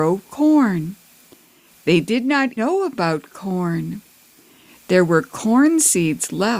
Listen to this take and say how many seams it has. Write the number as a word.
one